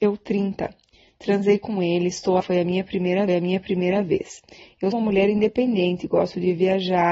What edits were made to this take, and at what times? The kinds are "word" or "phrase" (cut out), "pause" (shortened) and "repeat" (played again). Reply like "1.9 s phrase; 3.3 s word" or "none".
2.4 s word; 3.3 s repeat; 4.9 s word